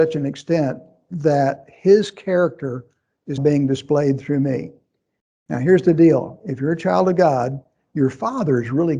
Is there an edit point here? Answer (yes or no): yes